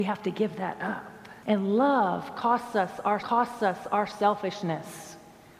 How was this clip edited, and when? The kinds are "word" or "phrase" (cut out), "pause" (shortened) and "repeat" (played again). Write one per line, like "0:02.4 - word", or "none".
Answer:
0:01.4 - pause
0:03.2 - repeat